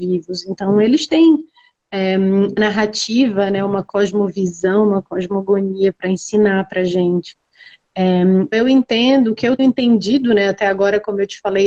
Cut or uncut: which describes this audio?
cut